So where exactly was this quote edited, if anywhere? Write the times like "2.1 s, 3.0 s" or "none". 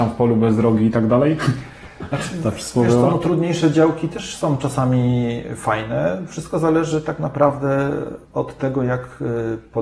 8.2 s